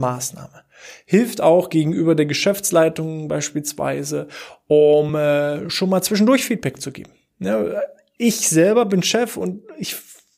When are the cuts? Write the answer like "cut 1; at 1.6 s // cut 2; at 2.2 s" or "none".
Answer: none